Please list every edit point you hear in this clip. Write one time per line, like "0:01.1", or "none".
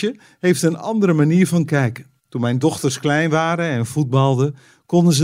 0:02.2